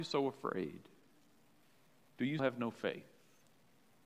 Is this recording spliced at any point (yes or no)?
yes